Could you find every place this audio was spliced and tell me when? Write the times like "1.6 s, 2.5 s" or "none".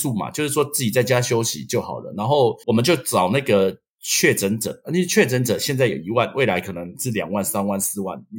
2.6 s